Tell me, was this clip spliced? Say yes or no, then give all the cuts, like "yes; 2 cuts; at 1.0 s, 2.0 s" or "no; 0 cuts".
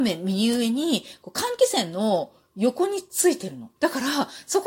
yes; 1 cut; at 3.8 s